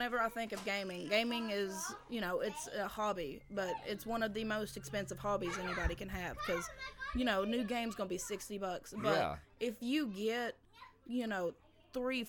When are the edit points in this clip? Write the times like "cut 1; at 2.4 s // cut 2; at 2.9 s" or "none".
none